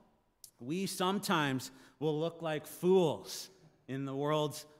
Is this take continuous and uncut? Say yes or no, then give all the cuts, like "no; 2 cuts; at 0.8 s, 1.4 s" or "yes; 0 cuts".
yes; 0 cuts